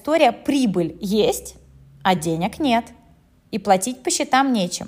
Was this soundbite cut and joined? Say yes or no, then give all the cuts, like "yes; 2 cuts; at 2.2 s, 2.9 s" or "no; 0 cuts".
no; 0 cuts